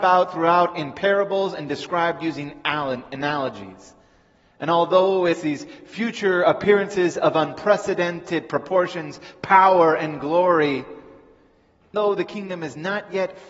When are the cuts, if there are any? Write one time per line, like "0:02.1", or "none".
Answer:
0:05.3
0:11.9